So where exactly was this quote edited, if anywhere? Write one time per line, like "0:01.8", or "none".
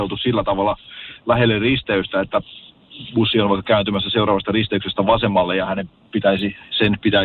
none